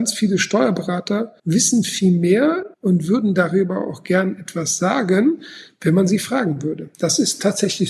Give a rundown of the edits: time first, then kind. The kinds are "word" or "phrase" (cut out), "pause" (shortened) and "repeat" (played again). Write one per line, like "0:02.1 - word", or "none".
0:01.4 - pause
0:02.7 - pause
0:06.9 - pause